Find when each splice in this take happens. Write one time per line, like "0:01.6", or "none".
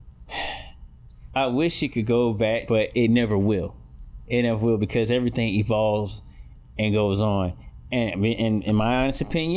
0:02.7